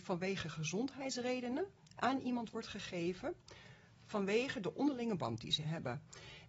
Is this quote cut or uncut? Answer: uncut